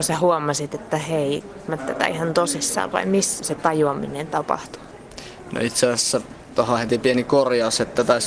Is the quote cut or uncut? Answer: cut